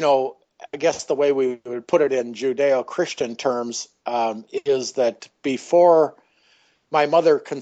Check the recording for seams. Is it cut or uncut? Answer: uncut